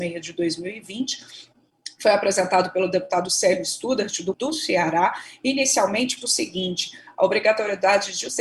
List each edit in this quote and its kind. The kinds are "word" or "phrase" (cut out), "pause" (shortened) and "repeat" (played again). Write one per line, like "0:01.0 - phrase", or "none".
0:04.3 - word
0:06.2 - word